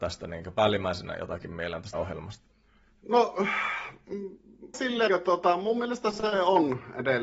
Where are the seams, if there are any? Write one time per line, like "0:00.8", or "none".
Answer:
0:01.9
0:04.7
0:05.1